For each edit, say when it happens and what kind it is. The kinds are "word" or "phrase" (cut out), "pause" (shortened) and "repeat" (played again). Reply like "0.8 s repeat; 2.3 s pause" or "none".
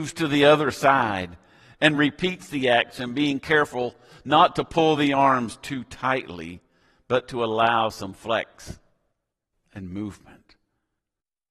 none

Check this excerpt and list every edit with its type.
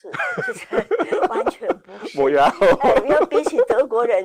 none

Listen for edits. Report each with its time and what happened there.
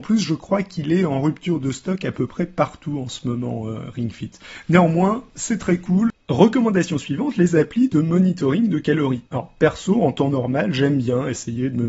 9.3 s pause

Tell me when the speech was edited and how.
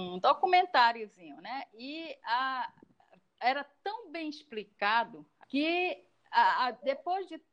5.4 s phrase

